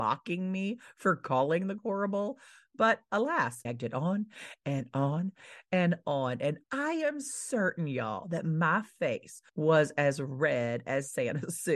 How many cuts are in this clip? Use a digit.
4